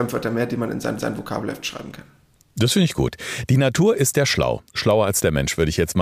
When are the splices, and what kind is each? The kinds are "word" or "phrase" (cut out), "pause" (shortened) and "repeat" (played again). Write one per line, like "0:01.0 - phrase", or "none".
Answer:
0:01.0 - repeat